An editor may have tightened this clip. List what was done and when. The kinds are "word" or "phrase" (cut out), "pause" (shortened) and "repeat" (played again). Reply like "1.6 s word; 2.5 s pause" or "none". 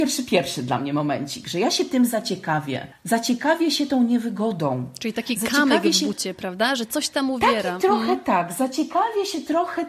2.9 s pause